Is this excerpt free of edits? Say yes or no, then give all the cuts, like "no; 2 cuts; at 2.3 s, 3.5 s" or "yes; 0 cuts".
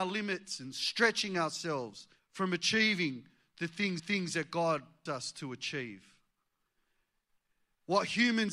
no; 3 cuts; at 2.2 s, 4.0 s, 5.1 s